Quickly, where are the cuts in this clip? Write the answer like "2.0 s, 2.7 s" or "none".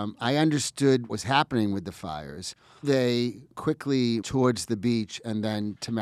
1.1 s, 2.8 s, 4.2 s